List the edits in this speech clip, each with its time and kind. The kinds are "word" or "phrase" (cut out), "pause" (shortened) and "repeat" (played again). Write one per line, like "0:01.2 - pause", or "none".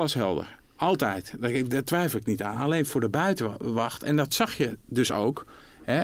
none